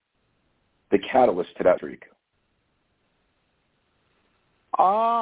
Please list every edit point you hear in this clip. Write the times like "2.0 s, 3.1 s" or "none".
1.8 s